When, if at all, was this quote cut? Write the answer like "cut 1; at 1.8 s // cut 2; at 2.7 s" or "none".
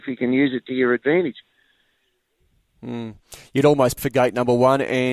cut 1; at 4.0 s